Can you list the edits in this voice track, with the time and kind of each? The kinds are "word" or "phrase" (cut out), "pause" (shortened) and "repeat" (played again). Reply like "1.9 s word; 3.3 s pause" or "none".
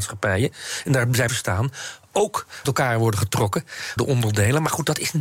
1.3 s word; 2.6 s word; 4.0 s word

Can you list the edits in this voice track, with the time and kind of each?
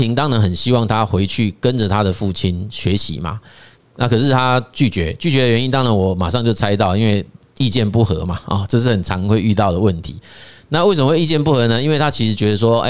none

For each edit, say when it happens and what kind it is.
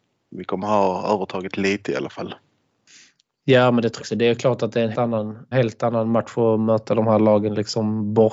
4.0 s word; 4.9 s word; 5.5 s word

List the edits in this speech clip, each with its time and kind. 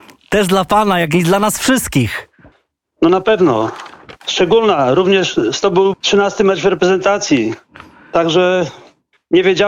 2.5 s pause; 4.2 s pause; 5.6 s phrase; 5.9 s word

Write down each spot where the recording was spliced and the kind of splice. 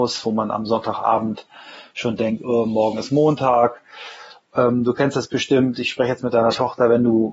none

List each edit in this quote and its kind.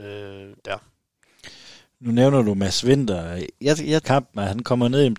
4.0 s phrase

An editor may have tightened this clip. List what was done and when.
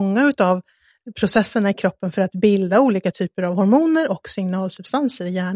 none

